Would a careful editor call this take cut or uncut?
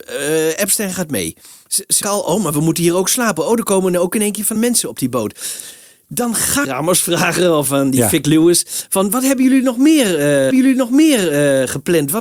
cut